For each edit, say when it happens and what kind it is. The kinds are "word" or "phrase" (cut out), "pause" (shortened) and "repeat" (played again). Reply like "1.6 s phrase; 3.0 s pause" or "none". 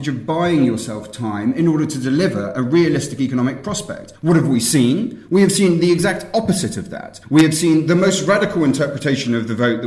4.2 s pause; 7.2 s pause